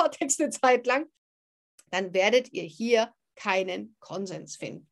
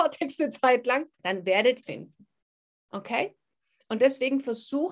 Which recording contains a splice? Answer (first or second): second